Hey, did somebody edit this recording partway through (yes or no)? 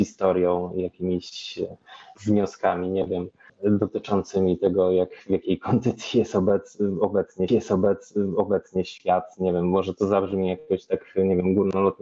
yes